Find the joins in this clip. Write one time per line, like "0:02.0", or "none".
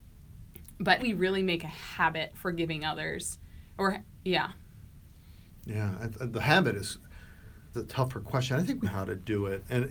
0:01.0
0:02.3
0:07.7
0:08.8